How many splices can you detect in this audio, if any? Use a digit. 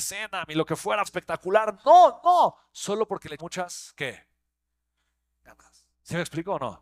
3